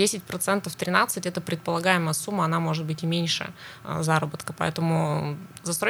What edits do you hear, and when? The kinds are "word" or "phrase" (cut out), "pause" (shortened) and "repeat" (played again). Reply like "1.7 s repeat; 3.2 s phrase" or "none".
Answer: none